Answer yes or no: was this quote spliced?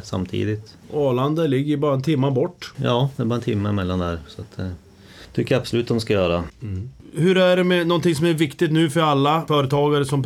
no